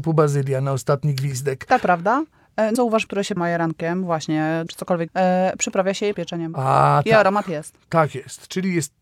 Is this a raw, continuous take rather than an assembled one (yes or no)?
no